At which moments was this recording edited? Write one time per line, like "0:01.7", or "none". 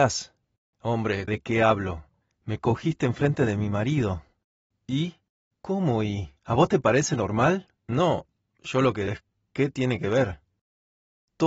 0:01.3
0:02.2
0:06.4
0:07.8
0:09.1